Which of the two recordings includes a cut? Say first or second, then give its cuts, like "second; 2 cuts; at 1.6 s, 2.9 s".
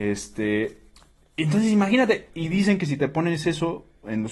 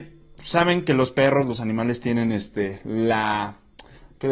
first; 1 cut; at 2.3 s